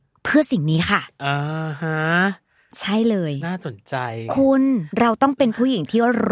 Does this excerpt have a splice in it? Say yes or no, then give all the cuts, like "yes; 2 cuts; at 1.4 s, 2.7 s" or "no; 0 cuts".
yes; 1 cut; at 4.9 s